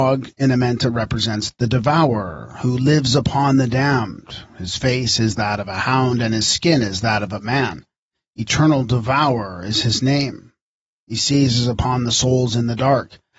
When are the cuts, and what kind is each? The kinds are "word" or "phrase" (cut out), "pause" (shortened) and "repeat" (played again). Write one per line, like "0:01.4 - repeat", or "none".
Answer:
none